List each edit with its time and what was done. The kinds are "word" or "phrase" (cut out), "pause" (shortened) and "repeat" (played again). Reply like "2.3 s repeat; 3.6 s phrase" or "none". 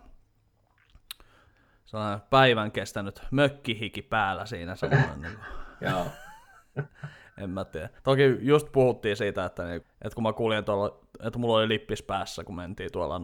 5.7 s pause; 8.0 s pause; 9.8 s word

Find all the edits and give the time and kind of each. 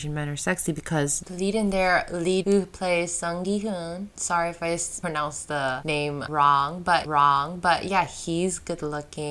2.4 s phrase; 7.0 s repeat

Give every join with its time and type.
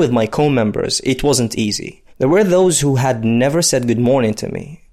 2.1 s pause

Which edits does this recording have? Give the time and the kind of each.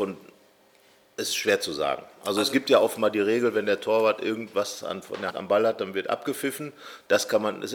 5.3 s word

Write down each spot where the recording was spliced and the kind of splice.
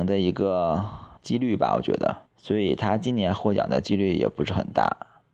1.2 s pause; 2.3 s pause

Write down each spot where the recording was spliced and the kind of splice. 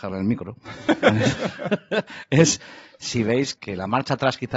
3.6 s word

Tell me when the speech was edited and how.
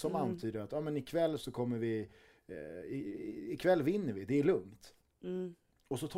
none

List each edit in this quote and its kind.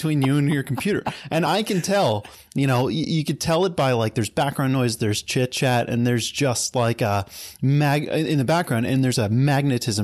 none

